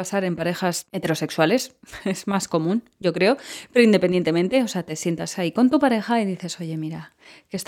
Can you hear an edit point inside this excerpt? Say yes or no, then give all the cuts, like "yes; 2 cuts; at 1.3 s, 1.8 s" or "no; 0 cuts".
no; 0 cuts